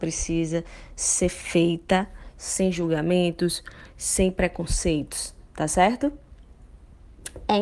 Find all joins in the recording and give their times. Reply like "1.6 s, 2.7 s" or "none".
none